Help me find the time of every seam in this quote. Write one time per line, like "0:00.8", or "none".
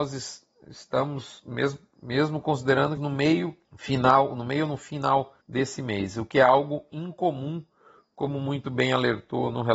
0:03.0
0:03.6
0:05.4